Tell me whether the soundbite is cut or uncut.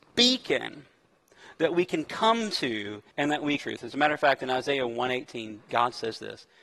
cut